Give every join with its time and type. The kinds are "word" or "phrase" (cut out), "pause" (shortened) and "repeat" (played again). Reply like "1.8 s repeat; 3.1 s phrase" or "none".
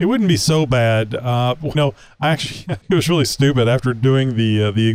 1.7 s word; 2.8 s pause

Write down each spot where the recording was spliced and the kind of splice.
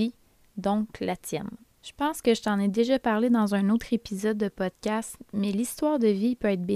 1.7 s pause

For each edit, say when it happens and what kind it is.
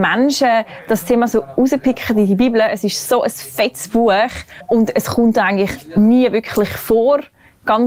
none

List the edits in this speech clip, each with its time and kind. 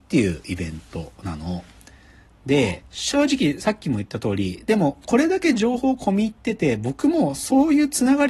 2.9 s pause

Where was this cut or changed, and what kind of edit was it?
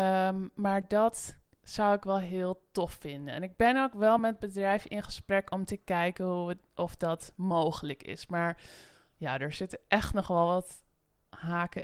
none

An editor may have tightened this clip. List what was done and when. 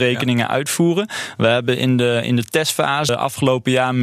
3.1 s word

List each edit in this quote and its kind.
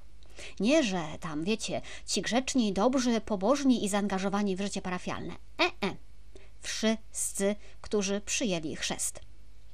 none

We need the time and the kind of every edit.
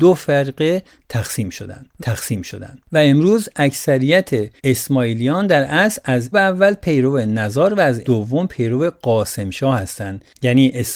2.0 s repeat; 4.6 s pause; 6.3 s word; 8.0 s word

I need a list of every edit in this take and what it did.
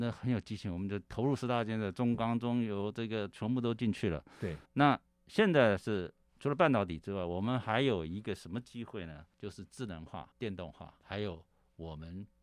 4.7 s pause; 9.3 s pause; 10.3 s pause; 11.0 s word

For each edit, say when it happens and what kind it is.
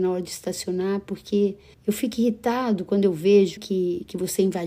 1.7 s pause; 3.6 s word

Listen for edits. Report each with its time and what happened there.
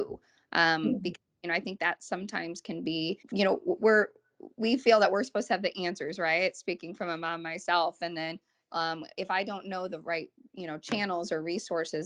3.2 s pause

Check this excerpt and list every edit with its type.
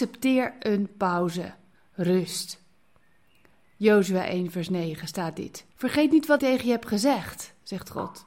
1.7 s pause; 5.7 s pause; 6.4 s word

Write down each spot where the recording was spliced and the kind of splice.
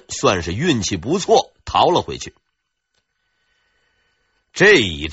none

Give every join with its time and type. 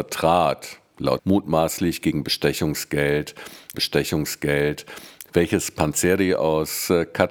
1.2 s word; 3.7 s repeat

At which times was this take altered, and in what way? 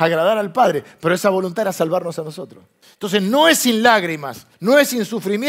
2.8 s pause; 4.5 s pause

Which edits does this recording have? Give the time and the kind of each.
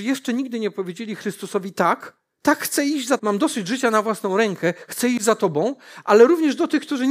2.3 s pause; 3.2 s word

